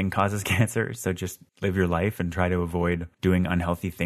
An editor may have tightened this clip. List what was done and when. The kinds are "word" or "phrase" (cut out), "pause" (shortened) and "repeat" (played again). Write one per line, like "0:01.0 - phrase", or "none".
0:01.5 - pause
0:03.1 - pause